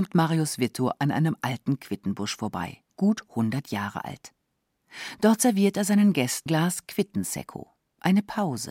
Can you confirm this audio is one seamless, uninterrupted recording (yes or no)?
no